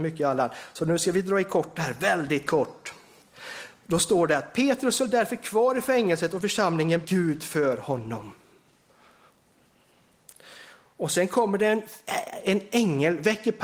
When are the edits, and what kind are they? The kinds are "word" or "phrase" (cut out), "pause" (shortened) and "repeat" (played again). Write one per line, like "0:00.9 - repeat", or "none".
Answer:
0:07.0 - phrase